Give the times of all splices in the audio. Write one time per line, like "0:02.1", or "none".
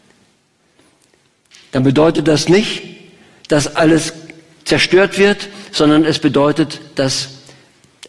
none